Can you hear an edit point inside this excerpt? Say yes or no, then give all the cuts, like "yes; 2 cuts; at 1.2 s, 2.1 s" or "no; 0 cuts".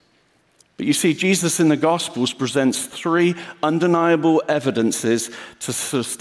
no; 0 cuts